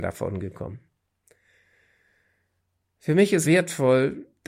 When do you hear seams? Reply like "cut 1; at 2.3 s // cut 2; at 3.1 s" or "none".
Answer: cut 1; at 3.4 s

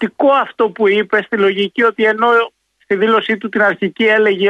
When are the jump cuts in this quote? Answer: none

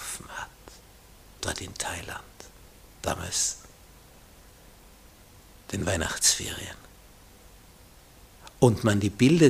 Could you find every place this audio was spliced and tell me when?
none

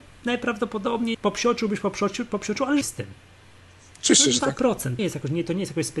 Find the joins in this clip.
cut 1; at 1.1 s // cut 2; at 2.8 s // cut 3; at 5.0 s

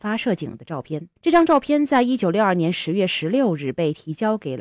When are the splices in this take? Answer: cut 1; at 1.2 s

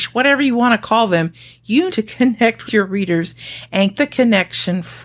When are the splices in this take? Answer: cut 1; at 1.9 s // cut 2; at 2.7 s // cut 3; at 3.9 s

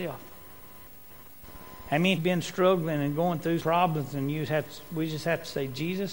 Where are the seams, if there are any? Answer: cut 1; at 2.2 s // cut 2; at 3.6 s

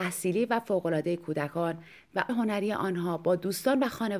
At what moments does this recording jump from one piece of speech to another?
cut 1; at 2.3 s

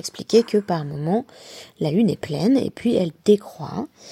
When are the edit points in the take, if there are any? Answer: none

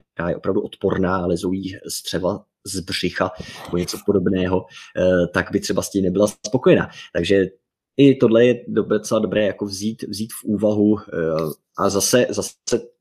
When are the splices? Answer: none

